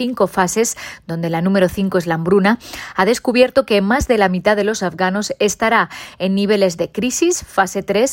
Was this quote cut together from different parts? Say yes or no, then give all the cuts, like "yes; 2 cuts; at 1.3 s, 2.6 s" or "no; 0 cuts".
no; 0 cuts